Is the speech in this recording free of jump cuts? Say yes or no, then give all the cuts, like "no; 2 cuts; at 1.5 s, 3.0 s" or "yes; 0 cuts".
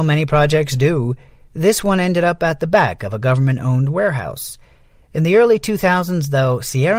yes; 0 cuts